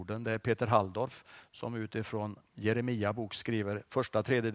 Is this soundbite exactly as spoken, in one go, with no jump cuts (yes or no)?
yes